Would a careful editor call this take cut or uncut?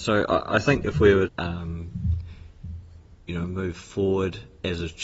cut